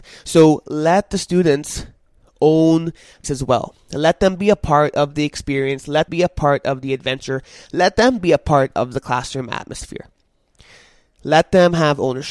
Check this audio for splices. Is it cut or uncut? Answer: cut